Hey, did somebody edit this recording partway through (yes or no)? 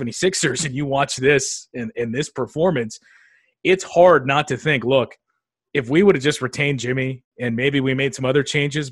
no